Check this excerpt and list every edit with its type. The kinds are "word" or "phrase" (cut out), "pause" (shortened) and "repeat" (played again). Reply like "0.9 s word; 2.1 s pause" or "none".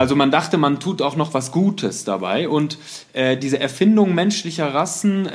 none